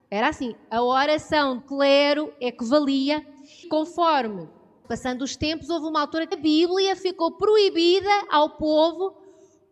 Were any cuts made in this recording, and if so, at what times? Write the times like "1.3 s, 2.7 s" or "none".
1.6 s, 3.6 s, 4.8 s, 6.3 s